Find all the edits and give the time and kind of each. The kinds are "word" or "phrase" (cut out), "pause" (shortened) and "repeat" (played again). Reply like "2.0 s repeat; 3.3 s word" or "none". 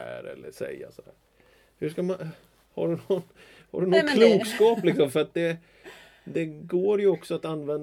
none